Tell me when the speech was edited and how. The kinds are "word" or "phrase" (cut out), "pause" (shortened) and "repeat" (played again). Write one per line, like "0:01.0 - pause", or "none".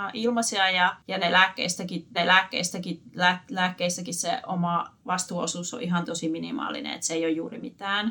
0:02.1 - repeat
0:05.0 - pause
0:06.1 - word